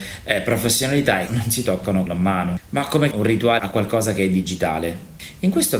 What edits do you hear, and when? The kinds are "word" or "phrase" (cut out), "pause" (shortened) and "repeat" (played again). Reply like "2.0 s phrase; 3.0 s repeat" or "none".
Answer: 1.3 s word; 2.1 s word; 3.1 s word; 3.6 s word